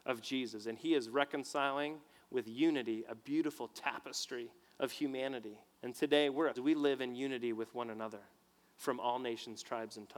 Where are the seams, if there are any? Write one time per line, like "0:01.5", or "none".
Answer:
0:05.7
0:06.5